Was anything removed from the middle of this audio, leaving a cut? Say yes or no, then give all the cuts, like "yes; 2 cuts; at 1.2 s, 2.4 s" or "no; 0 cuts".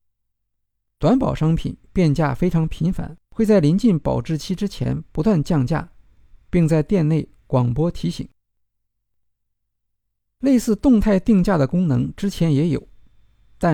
yes; 1 cut; at 3.2 s